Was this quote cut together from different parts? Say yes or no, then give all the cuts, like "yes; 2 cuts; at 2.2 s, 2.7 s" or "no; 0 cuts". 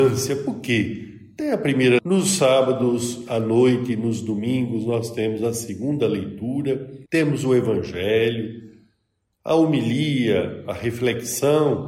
yes; 2 cuts; at 2.0 s, 7.1 s